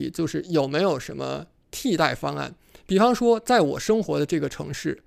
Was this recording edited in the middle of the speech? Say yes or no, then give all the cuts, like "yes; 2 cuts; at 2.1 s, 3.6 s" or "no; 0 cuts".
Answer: no; 0 cuts